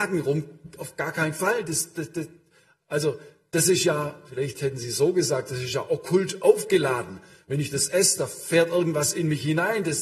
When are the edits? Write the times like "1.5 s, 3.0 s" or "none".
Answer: none